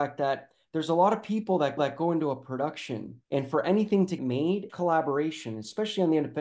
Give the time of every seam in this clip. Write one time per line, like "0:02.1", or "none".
0:01.8
0:03.2
0:04.2
0:04.7